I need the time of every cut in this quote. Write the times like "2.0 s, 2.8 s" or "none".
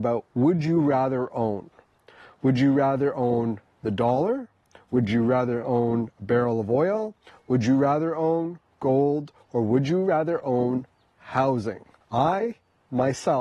none